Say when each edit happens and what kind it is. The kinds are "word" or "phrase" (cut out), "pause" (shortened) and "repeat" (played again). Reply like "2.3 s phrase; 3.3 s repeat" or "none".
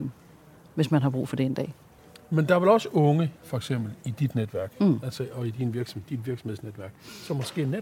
2.0 s pause